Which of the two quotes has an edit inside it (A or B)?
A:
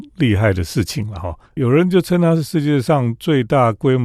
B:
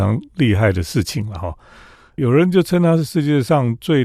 A